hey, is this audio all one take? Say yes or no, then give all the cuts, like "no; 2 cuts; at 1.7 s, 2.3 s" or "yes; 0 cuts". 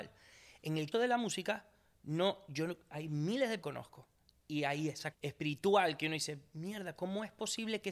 no; 3 cuts; at 0.9 s, 3.6 s, 5.1 s